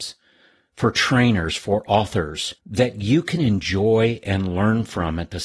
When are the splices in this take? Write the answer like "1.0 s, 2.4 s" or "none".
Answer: 2.6 s